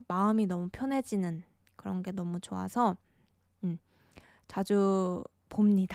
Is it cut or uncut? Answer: uncut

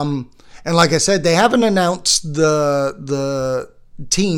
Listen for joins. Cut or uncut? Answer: uncut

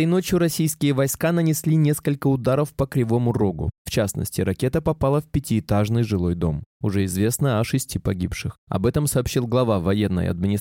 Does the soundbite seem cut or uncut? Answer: uncut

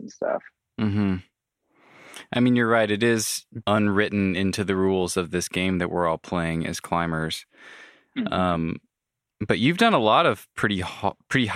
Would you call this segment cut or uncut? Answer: cut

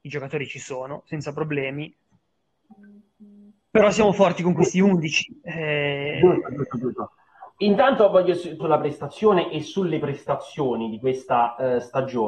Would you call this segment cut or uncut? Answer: cut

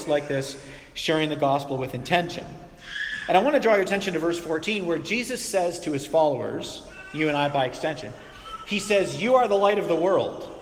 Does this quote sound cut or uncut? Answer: uncut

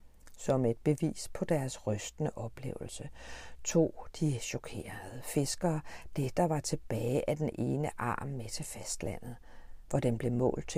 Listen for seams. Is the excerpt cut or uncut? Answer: uncut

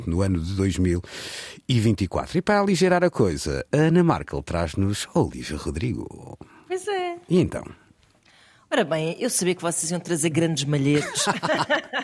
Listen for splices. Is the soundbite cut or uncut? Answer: uncut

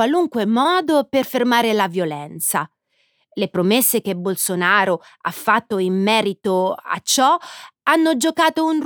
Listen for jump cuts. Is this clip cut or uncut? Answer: uncut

